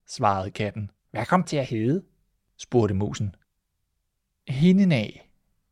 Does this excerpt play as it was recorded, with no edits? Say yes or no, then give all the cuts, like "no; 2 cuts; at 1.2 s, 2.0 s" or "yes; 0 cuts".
no; 2 cuts; at 1.0 s, 1.4 s